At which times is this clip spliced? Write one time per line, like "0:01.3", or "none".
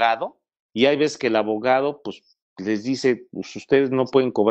none